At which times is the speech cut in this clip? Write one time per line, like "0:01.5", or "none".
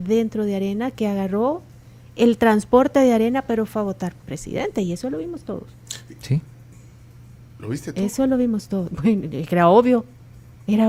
0:04.2